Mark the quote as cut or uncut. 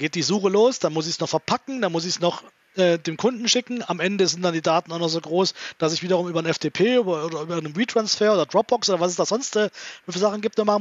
uncut